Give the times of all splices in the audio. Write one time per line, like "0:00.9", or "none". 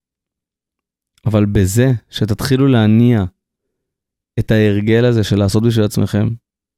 none